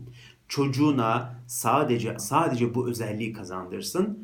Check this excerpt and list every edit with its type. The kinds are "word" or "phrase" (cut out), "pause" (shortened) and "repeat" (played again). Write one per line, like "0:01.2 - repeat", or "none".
0:02.2 - word